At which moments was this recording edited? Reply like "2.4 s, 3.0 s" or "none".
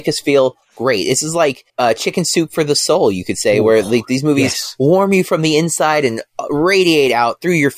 1.7 s